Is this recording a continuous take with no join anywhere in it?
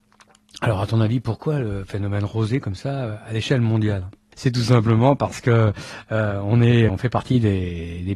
no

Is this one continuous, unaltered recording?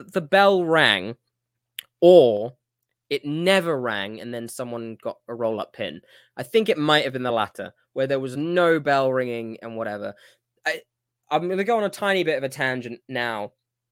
yes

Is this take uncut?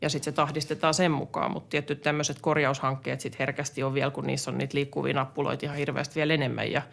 yes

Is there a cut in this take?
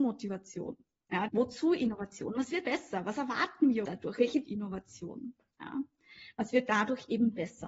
yes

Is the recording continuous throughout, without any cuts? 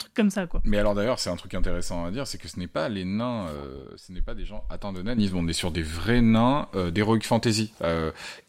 yes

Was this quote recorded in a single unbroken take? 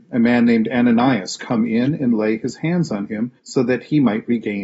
no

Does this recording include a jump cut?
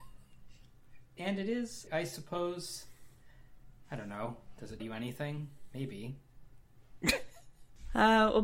yes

